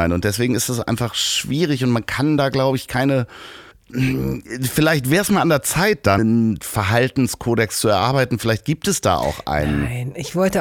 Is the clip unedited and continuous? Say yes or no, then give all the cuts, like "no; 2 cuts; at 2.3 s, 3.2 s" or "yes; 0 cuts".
no; 2 cuts; at 3.7 s, 6.2 s